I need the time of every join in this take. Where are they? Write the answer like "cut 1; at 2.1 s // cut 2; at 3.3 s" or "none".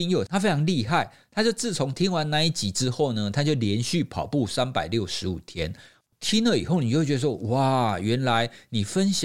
none